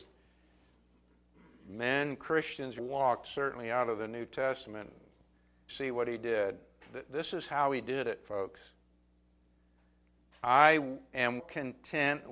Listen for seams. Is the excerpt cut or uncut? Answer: cut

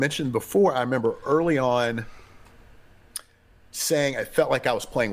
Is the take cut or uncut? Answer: uncut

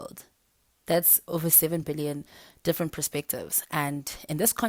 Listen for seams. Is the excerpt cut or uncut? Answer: uncut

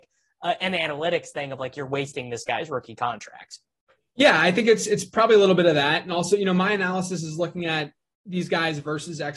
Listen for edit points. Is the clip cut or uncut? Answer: uncut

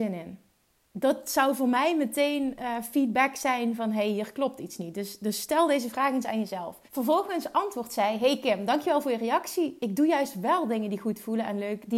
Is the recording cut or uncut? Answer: cut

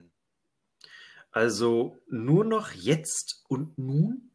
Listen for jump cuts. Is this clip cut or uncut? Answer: uncut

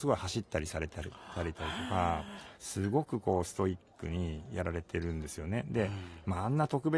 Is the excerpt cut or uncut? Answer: cut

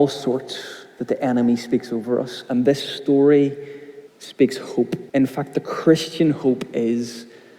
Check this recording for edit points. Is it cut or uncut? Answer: cut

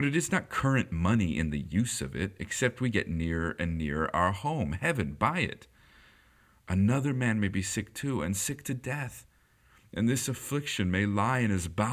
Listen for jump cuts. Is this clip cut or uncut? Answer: uncut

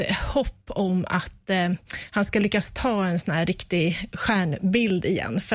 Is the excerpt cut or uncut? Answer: uncut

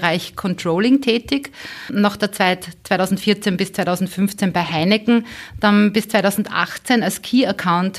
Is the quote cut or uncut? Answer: uncut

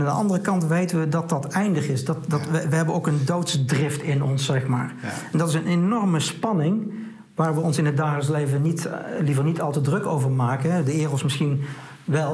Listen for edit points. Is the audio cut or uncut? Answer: uncut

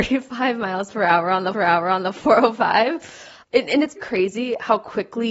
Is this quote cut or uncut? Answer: cut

